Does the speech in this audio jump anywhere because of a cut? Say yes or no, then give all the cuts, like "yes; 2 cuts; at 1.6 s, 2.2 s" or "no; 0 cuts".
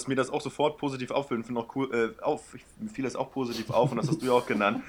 no; 0 cuts